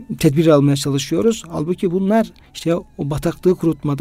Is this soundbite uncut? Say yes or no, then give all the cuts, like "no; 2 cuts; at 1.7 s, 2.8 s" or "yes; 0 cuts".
yes; 0 cuts